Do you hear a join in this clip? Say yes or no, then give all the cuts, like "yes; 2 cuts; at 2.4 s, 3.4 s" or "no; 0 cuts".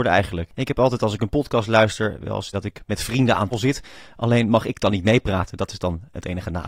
yes; 2 cuts; at 2.5 s, 3.5 s